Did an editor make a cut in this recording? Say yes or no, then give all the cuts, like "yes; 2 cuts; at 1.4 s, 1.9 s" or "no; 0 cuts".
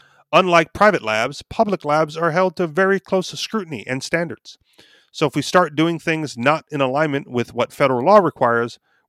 no; 0 cuts